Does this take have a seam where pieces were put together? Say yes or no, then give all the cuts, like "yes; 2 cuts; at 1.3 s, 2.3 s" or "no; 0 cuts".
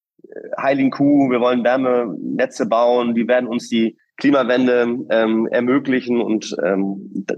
no; 0 cuts